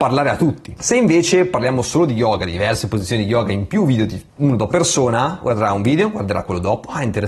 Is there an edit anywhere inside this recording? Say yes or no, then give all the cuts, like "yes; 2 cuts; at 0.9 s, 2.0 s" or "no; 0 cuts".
yes; 2 cuts; at 4.3 s, 4.7 s